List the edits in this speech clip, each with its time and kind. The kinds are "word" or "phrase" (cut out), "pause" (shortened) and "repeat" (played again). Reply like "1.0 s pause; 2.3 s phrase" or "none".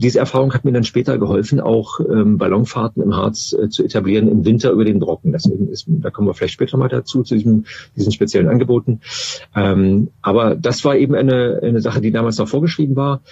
9.5 s pause